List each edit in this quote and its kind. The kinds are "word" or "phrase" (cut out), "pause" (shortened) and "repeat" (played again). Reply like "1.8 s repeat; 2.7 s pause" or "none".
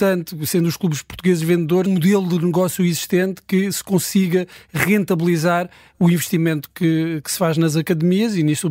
1.9 s phrase